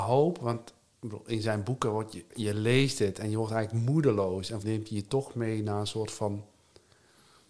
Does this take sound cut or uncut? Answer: cut